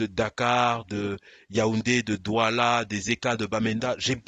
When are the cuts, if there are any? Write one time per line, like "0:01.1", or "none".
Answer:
none